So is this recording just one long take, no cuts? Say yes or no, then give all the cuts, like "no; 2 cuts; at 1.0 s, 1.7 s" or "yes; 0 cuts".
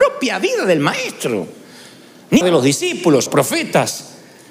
no; 2 cuts; at 2.4 s, 3.3 s